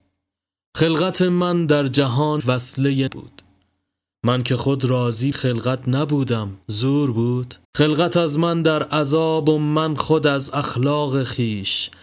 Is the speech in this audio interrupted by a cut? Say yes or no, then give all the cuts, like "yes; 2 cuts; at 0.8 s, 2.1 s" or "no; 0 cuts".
yes; 5 cuts; at 2.4 s, 3.1 s, 5.3 s, 6.6 s, 7.6 s